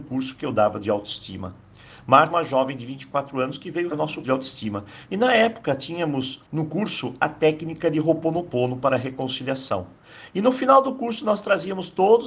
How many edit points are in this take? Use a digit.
4